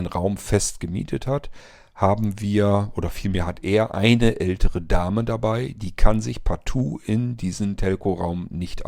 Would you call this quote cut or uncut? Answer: uncut